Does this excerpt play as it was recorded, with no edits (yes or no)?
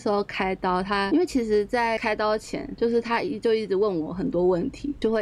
yes